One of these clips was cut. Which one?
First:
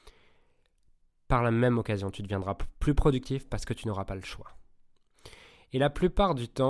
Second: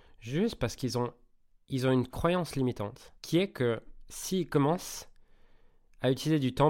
second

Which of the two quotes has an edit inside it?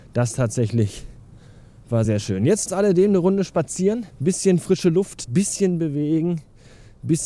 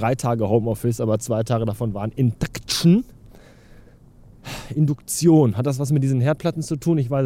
first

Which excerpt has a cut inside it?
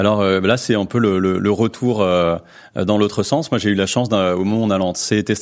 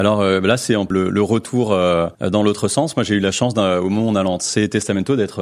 second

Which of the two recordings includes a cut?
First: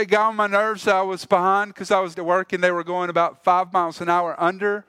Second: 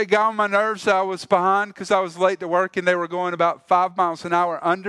first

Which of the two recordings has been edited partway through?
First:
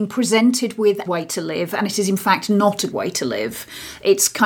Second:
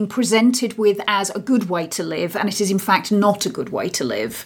first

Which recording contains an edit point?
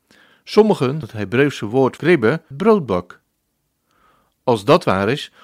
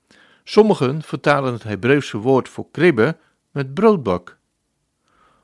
first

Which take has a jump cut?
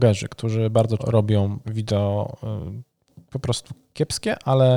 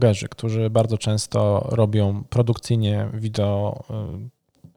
first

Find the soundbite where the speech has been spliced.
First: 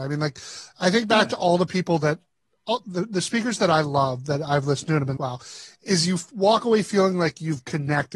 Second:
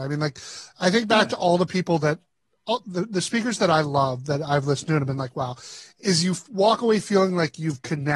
first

